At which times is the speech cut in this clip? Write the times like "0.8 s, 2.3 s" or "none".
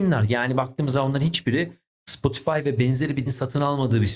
3.3 s